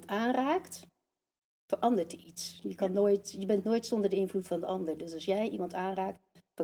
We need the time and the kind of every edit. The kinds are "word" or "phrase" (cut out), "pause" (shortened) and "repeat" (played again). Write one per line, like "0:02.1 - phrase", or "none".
none